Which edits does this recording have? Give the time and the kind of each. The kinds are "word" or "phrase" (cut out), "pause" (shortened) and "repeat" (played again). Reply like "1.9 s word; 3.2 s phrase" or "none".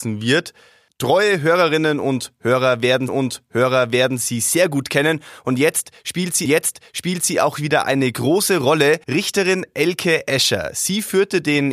3.1 s repeat; 6.5 s repeat; 9.0 s pause